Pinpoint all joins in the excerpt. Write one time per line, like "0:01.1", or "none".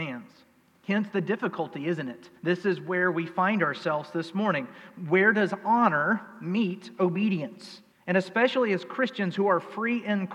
0:02.4
0:07.9